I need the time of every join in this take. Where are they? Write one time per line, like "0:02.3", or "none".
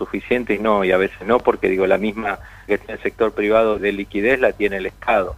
0:02.7
0:03.8